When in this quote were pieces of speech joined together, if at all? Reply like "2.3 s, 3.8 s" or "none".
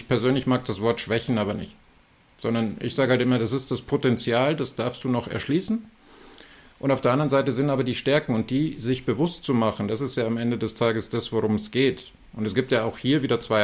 none